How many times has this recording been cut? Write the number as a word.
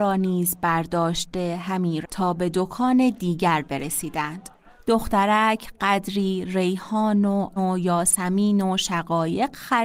two